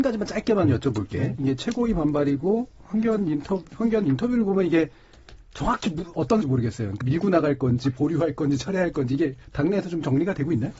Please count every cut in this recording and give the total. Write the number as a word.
three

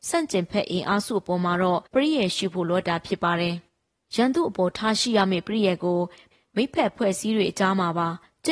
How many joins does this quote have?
one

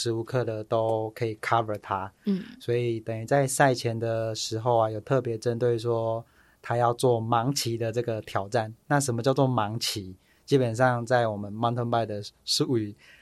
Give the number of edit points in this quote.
zero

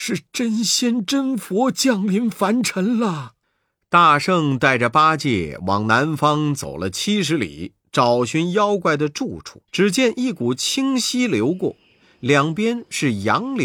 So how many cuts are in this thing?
two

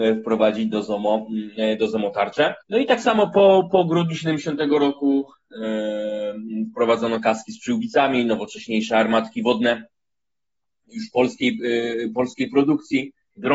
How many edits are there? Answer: one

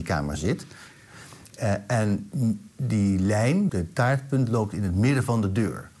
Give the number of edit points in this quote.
one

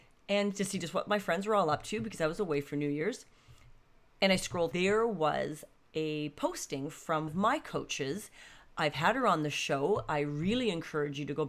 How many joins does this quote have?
two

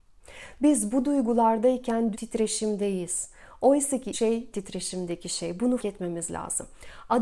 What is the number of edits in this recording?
four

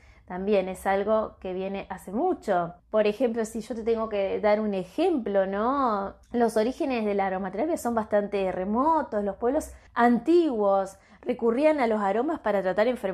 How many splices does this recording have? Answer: three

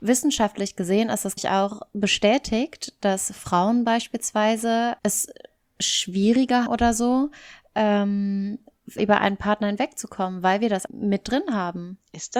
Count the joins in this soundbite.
five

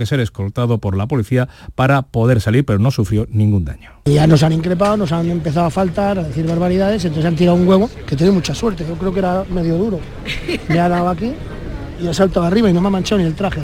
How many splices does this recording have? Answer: two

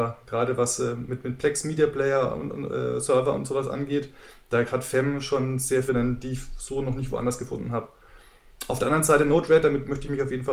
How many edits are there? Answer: one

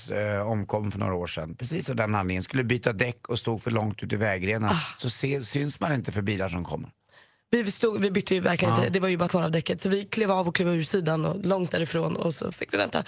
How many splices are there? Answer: one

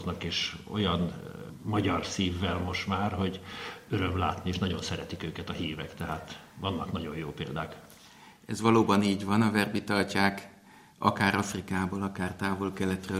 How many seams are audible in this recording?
zero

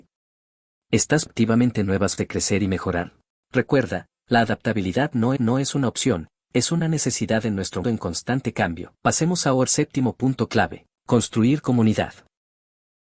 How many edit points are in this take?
eight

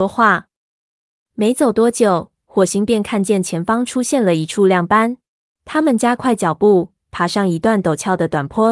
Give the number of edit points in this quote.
one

